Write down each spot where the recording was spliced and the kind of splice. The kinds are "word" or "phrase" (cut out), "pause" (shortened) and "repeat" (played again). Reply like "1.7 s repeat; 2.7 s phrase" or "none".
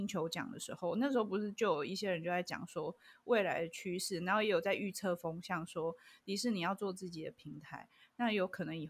none